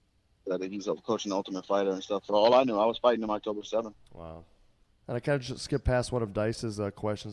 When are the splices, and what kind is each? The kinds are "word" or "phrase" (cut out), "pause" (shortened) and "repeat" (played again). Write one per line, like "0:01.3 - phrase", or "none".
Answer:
0:04.9 - pause